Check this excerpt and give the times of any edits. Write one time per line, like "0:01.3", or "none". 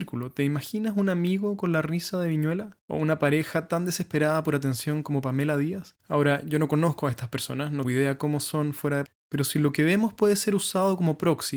0:02.8
0:06.0
0:07.8
0:09.1

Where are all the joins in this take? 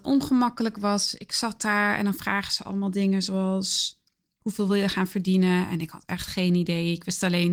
none

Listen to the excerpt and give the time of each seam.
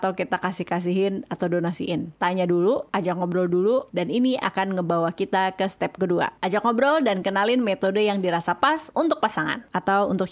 none

